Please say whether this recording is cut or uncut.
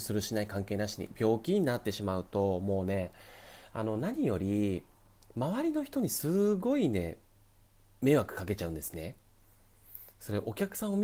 uncut